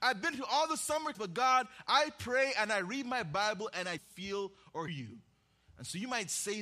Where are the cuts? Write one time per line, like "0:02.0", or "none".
0:01.1
0:04.0
0:04.9